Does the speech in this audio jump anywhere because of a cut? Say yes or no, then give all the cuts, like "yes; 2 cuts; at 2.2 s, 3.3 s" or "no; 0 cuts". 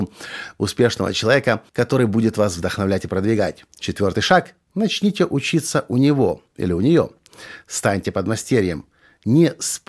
yes; 2 cuts; at 1.7 s, 3.7 s